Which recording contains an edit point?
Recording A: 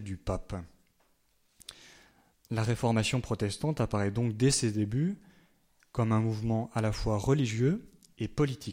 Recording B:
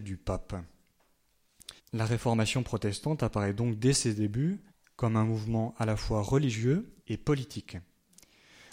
B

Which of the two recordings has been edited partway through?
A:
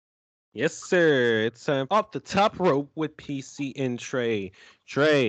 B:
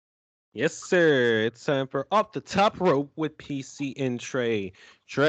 A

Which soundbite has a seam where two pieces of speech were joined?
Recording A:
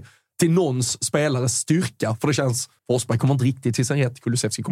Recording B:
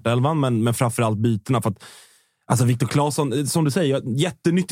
A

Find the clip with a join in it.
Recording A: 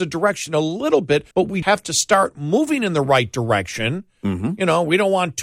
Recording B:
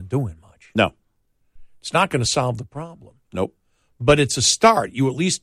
A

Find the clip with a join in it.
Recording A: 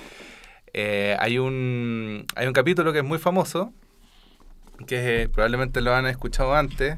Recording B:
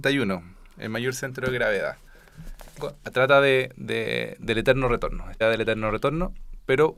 B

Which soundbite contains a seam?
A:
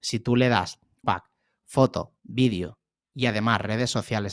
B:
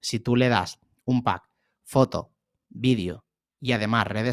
A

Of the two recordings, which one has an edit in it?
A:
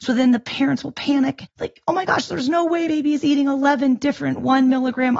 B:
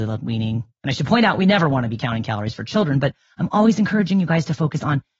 A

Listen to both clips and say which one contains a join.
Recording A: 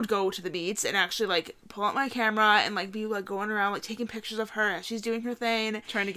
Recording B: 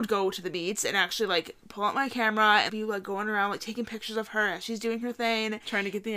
B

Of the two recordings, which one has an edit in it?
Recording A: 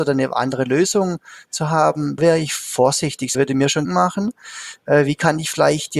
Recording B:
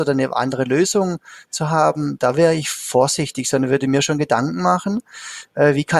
A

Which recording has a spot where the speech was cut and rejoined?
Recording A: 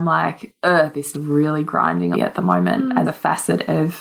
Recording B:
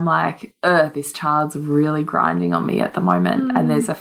A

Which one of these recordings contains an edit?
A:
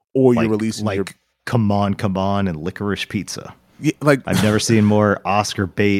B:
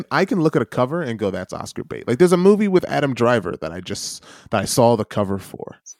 A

